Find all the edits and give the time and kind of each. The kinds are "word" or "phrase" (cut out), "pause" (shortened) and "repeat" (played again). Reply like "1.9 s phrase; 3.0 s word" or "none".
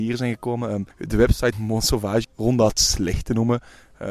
0.9 s pause; 1.5 s word; 2.2 s phrase